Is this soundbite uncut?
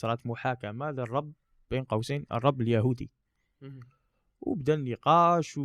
yes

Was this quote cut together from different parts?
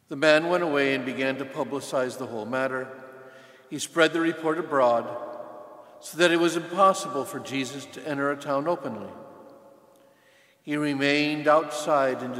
no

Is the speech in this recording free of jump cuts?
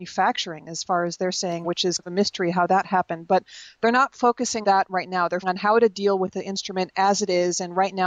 no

